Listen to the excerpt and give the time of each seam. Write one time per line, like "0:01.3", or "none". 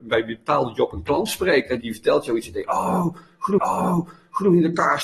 0:01.8
0:03.6